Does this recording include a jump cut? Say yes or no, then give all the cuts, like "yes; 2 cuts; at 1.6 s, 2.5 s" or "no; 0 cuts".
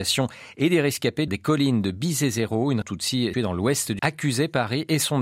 yes; 4 cuts; at 1.3 s, 2.8 s, 3.3 s, 4.0 s